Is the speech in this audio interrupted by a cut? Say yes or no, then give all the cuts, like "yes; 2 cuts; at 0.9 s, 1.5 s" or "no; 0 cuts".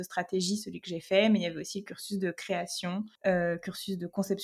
yes; 1 cut; at 3.2 s